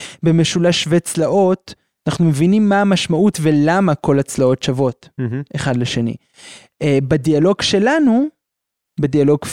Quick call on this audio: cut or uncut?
uncut